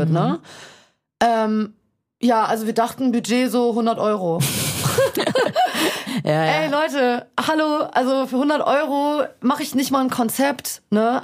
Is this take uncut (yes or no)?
yes